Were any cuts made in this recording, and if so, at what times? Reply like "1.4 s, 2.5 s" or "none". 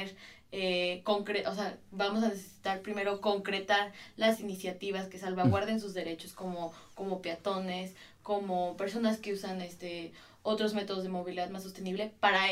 none